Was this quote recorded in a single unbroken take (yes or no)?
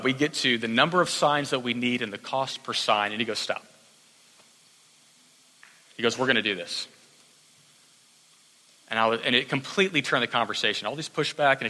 yes